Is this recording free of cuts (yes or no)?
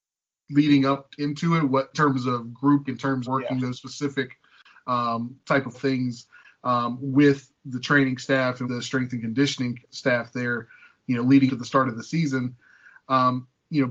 no